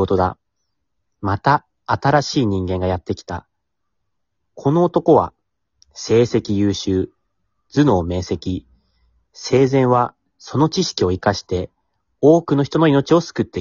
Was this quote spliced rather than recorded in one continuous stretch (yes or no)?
no